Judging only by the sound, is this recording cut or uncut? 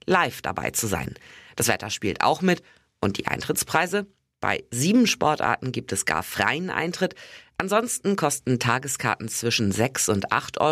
uncut